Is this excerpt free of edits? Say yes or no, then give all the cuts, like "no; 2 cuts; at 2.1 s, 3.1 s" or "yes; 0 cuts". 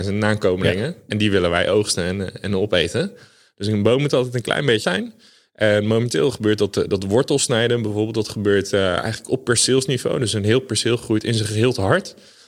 no; 1 cut; at 4.8 s